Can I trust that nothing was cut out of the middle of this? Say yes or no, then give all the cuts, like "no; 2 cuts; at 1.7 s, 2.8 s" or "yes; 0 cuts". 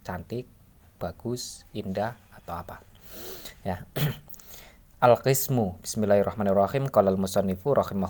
yes; 0 cuts